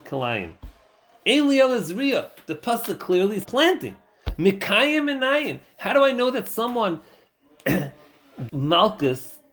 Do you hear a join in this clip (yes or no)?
yes